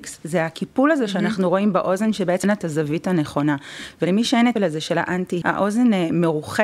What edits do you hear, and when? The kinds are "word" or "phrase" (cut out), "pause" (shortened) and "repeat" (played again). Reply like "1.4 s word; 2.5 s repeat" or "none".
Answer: 2.4 s word; 4.6 s word; 5.4 s word